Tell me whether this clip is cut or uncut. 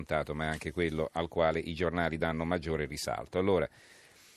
uncut